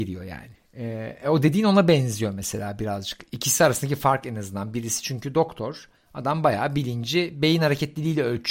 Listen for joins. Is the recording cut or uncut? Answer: uncut